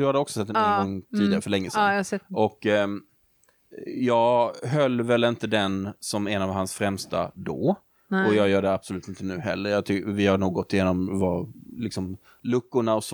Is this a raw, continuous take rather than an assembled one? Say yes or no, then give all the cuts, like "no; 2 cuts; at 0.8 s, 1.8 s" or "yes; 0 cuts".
yes; 0 cuts